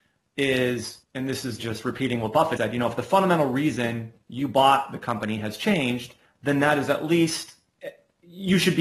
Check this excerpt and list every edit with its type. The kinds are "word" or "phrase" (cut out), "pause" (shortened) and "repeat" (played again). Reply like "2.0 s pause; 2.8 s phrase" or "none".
1.0 s pause; 1.6 s word; 2.6 s word; 6.2 s pause